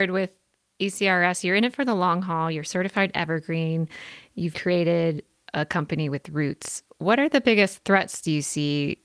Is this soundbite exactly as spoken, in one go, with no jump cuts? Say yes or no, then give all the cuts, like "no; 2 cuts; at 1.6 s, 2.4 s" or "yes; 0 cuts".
no; 1 cut; at 4.5 s